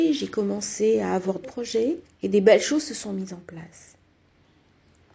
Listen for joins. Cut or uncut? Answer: cut